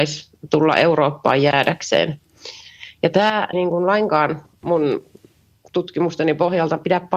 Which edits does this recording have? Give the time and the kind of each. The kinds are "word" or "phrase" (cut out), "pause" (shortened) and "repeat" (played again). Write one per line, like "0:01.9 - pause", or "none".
0:03.5 - word
0:04.5 - pause